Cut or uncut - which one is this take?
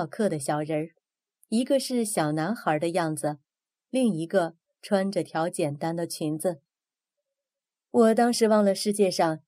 uncut